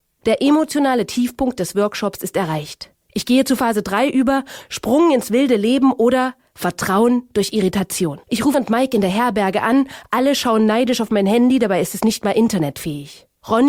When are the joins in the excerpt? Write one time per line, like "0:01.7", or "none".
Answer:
0:08.2
0:08.5

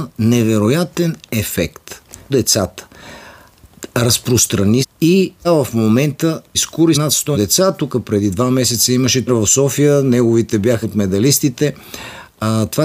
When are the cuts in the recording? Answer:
0:02.3
0:04.8
0:05.4
0:06.5
0:06.9
0:07.3
0:09.3
0:10.8

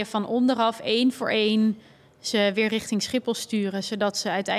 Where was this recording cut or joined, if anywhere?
none

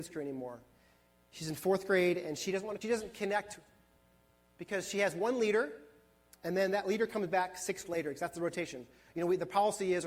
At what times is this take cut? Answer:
0:02.8
0:07.9

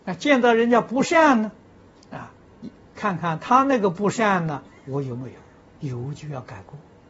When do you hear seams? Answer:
0:02.9
0:05.7

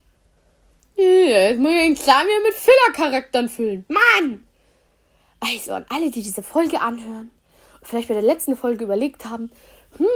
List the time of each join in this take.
none

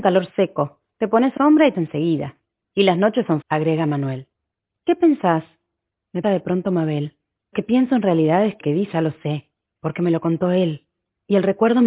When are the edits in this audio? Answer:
0:01.4
0:01.7
0:03.4
0:06.2
0:07.5
0:08.6
0:08.9

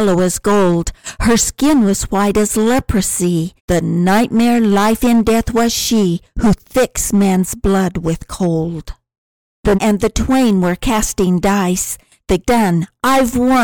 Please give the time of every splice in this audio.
0:03.6
0:09.7
0:12.4

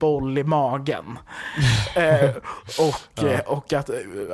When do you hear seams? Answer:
none

